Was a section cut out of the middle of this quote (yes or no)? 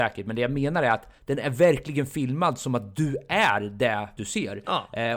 yes